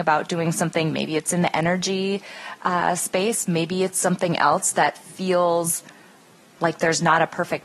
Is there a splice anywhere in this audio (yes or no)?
no